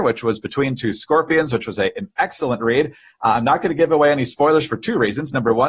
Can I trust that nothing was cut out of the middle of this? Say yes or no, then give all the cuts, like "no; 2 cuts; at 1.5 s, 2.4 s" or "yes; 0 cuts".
yes; 0 cuts